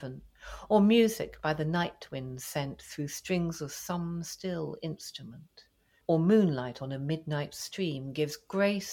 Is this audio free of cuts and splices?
yes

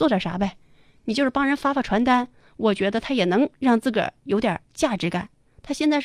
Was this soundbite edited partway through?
yes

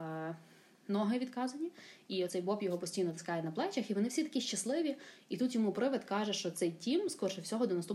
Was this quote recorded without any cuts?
yes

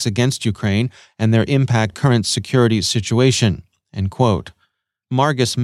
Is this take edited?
yes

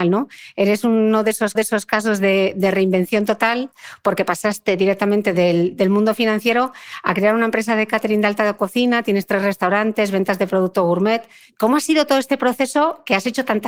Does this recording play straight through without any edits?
no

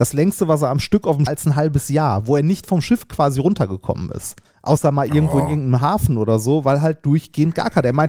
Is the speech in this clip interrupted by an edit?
yes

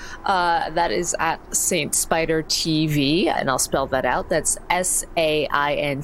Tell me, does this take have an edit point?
no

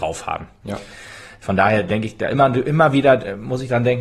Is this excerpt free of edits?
yes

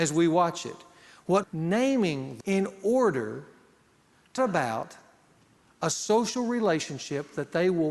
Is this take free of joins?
no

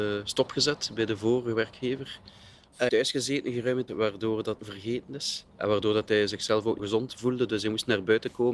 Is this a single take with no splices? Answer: no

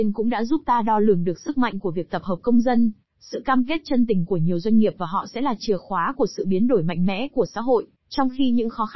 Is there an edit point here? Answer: yes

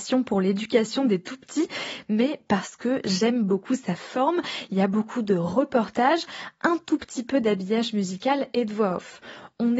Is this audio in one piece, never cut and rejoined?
yes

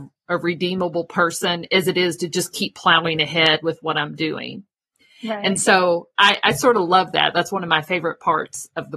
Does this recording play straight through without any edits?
yes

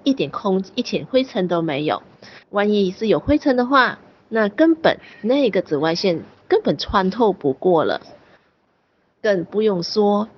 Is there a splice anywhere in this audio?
yes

